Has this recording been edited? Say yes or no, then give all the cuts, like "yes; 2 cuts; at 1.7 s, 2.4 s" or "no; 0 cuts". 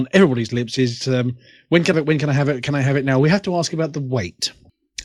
yes; 1 cut; at 1.9 s